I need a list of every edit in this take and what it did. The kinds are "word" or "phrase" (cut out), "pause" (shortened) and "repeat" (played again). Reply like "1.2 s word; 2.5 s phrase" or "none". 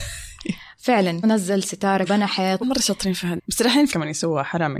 1.2 s word; 2.1 s word; 2.6 s word; 3.4 s word; 3.9 s word